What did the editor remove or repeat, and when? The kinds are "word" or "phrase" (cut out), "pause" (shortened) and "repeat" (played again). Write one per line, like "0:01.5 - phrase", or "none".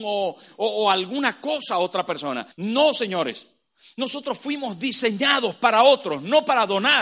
0:02.5 - pause